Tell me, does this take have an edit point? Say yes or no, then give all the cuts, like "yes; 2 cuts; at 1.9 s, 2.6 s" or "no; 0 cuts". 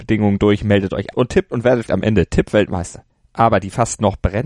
yes; 3 cuts; at 1.1 s, 1.5 s, 1.9 s